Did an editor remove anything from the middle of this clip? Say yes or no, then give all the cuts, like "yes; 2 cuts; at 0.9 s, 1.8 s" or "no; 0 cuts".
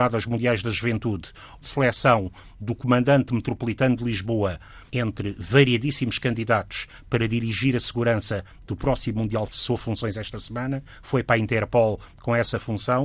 yes; 3 cuts; at 1.6 s, 4.9 s, 9.5 s